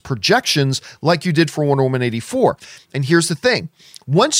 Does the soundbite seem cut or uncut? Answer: uncut